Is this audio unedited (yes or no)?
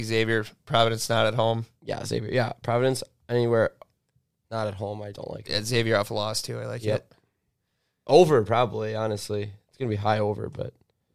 no